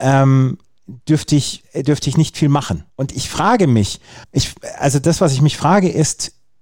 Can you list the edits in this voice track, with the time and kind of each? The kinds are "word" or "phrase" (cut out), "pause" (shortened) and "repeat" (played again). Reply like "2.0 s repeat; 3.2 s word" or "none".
1.0 s pause; 2.9 s pause; 4.2 s pause